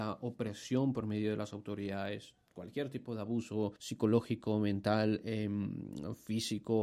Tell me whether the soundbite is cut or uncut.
cut